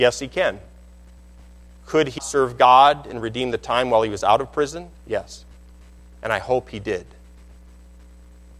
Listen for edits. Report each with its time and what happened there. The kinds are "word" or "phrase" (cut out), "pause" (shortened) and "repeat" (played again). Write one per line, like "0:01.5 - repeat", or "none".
0:01.2 - pause
0:02.2 - word
0:04.9 - pause